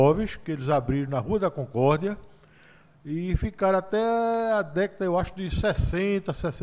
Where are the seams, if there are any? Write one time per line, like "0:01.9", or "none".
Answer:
none